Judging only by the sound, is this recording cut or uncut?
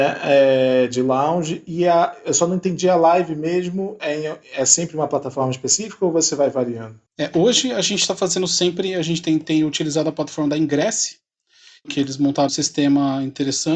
cut